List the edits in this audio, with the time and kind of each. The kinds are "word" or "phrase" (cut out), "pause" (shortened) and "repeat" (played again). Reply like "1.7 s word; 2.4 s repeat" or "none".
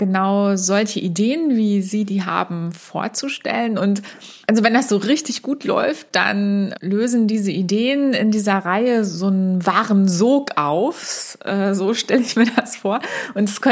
4.4 s pause; 6.7 s word